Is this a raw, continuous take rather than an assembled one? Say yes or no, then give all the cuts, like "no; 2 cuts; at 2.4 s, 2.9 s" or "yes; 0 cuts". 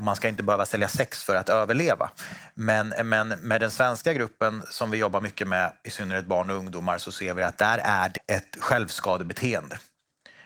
no; 1 cut; at 8.2 s